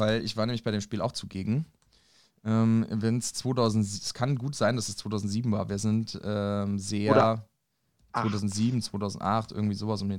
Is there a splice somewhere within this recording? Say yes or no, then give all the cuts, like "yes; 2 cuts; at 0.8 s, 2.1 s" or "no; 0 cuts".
no; 0 cuts